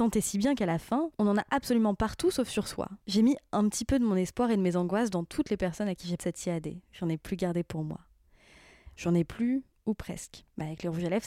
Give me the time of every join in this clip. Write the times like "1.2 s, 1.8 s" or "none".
6.2 s